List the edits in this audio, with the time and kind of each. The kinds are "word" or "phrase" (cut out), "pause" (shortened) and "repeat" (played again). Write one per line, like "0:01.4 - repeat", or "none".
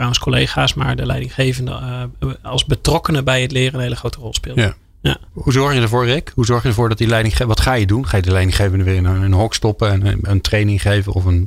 0:05.3 - pause